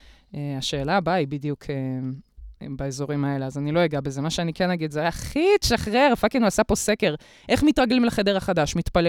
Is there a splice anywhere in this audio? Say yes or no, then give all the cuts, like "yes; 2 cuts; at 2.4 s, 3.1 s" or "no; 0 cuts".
no; 0 cuts